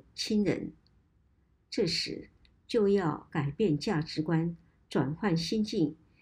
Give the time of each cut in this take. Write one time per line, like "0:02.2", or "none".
none